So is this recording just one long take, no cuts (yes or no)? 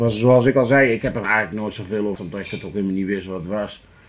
no